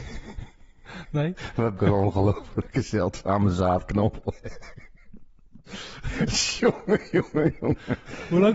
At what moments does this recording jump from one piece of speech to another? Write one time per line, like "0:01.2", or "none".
0:01.8